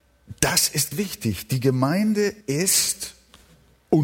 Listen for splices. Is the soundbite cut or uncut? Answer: cut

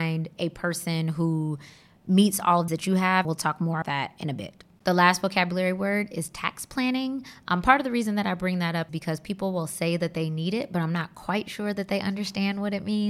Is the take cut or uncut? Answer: cut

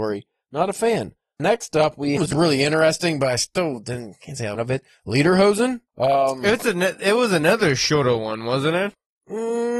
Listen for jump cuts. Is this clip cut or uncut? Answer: cut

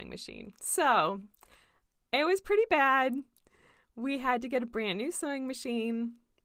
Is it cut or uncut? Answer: uncut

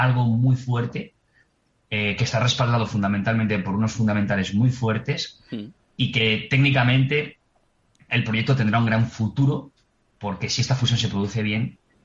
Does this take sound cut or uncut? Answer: uncut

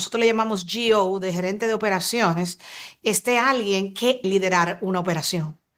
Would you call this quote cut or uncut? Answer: cut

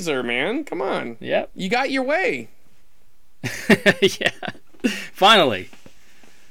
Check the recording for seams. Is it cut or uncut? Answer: uncut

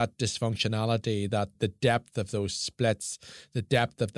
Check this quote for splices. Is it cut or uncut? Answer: uncut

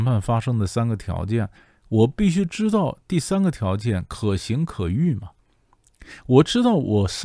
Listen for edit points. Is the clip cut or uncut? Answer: uncut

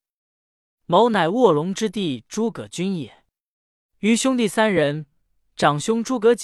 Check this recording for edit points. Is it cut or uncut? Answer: uncut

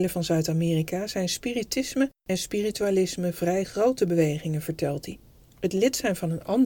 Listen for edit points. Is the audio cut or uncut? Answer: uncut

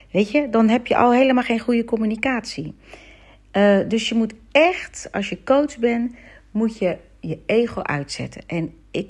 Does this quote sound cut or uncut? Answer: uncut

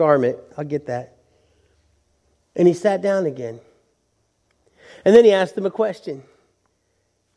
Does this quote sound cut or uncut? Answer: uncut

